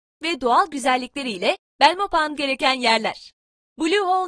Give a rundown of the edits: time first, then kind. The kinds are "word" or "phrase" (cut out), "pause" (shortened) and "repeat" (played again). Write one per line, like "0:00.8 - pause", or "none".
0:02.3 - word